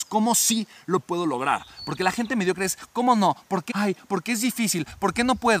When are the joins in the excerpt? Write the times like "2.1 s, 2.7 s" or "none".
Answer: 3.7 s